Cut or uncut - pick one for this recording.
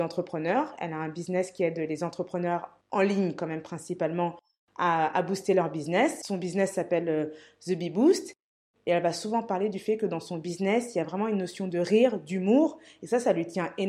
uncut